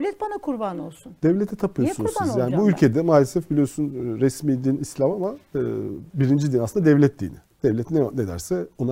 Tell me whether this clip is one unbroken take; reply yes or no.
yes